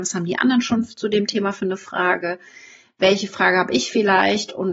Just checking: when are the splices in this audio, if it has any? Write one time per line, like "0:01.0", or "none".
none